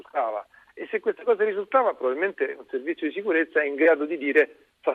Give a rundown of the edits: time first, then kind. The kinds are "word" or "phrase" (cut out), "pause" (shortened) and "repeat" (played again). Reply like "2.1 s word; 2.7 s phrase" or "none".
none